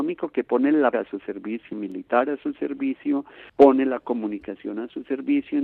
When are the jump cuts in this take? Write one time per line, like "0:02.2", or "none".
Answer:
0:00.9
0:01.7
0:03.5